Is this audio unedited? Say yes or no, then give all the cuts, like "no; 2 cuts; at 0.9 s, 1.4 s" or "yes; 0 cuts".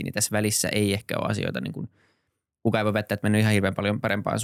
yes; 0 cuts